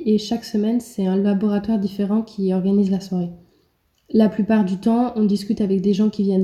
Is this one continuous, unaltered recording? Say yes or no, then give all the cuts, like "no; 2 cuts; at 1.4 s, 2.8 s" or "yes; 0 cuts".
yes; 0 cuts